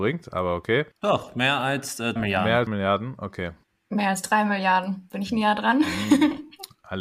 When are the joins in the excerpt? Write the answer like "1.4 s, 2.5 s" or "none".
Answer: 0.9 s, 2.2 s, 2.7 s, 3.6 s